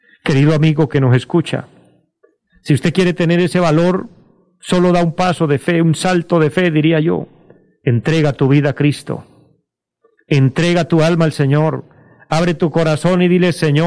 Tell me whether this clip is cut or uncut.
uncut